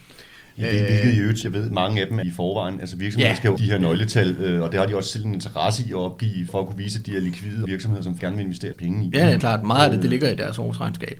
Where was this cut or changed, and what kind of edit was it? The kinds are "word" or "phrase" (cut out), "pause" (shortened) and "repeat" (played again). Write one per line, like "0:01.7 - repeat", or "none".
0:01.4 - word
0:02.2 - word
0:03.6 - word
0:06.5 - word
0:07.7 - word
0:08.2 - word
0:08.7 - word
0:09.4 - word